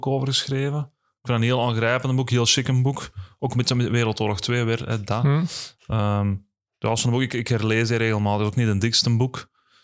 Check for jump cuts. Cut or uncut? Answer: uncut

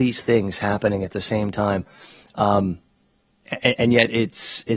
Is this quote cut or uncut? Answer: uncut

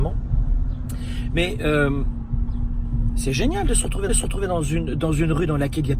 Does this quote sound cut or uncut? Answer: cut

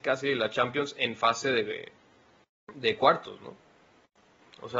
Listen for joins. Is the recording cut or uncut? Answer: uncut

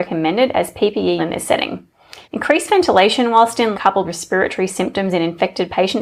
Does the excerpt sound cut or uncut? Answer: cut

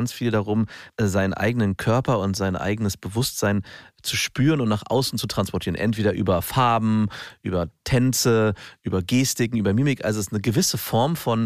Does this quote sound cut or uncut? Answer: uncut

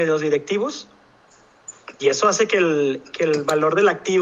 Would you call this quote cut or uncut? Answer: uncut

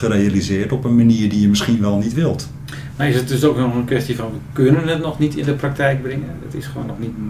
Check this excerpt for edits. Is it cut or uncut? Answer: uncut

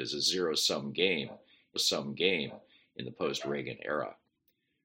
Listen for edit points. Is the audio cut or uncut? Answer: cut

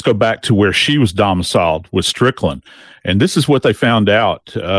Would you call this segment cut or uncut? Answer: uncut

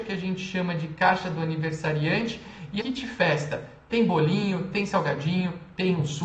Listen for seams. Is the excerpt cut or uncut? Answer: cut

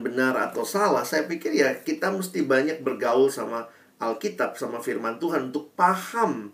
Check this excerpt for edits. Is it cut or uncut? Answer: uncut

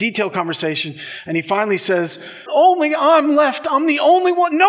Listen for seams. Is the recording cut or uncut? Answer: cut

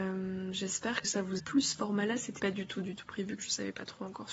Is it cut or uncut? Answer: cut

